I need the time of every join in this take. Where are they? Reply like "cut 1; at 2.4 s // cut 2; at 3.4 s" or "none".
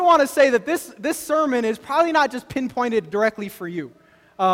none